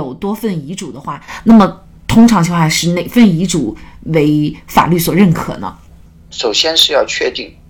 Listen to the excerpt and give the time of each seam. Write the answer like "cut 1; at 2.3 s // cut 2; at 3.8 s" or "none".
none